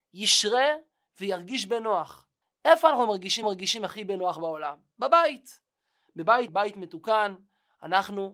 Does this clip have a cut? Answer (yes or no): yes